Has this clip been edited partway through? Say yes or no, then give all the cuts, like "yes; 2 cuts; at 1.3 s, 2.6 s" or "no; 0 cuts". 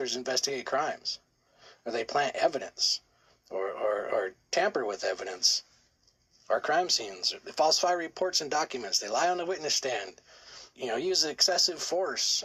yes; 1 cut; at 10.7 s